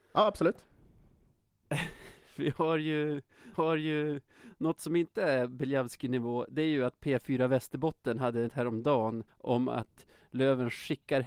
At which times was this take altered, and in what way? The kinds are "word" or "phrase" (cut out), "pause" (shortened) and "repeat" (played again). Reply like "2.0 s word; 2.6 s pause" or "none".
3.5 s repeat; 8.5 s word; 9.3 s pause